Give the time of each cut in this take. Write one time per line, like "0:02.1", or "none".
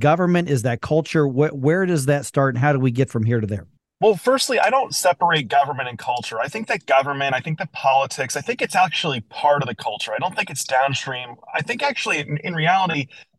0:03.8